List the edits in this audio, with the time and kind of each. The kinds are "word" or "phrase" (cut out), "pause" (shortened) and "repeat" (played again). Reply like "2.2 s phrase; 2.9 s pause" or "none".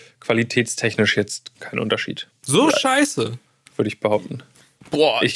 1.5 s word; 2.4 s pause